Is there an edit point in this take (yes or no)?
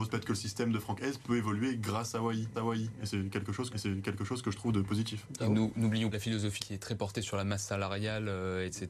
yes